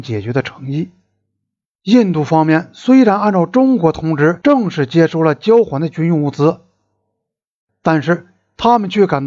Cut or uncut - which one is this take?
uncut